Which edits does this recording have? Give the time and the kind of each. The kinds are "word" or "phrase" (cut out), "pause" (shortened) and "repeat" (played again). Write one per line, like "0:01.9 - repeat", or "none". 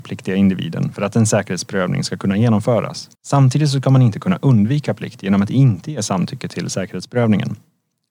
0:03.1 - pause